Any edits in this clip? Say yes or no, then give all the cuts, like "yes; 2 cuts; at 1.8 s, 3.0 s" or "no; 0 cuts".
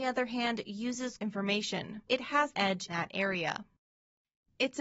yes; 4 cuts; at 1.2 s, 2.1 s, 2.5 s, 2.9 s